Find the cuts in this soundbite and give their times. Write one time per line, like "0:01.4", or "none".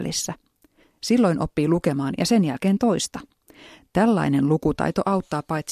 0:02.1